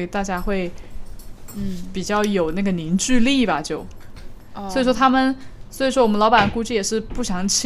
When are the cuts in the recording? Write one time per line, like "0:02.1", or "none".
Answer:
none